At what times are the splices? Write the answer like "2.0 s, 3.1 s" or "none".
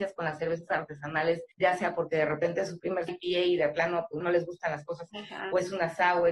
1.5 s, 3.1 s, 4.2 s, 5.1 s

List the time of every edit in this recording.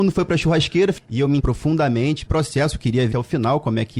1.4 s, 2.3 s, 3.1 s

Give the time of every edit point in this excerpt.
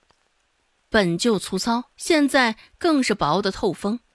1.9 s

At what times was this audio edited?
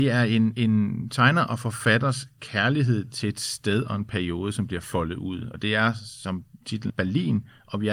6.9 s

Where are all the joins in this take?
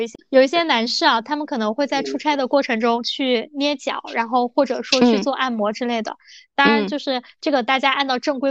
none

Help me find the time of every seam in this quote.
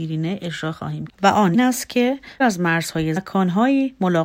1.1 s, 1.5 s, 2.4 s, 3.2 s

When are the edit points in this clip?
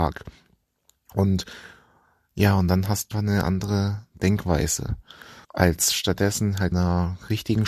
3.1 s, 5.4 s, 6.7 s

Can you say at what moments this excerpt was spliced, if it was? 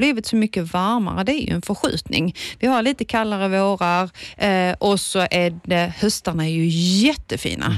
none

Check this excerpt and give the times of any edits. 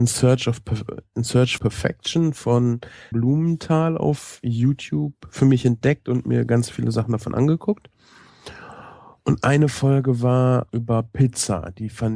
1.6 s, 3.1 s, 10.7 s

